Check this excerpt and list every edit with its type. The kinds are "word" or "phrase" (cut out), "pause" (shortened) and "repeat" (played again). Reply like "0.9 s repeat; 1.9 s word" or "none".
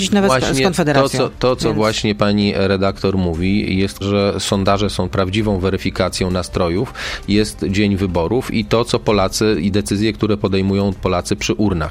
4.0 s word; 5.1 s phrase